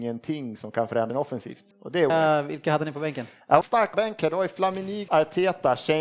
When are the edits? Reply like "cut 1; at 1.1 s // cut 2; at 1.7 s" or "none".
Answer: cut 1; at 1.1 s // cut 2; at 1.7 s // cut 3; at 2.1 s // cut 4; at 3.6 s // cut 5; at 3.9 s // cut 6; at 5.1 s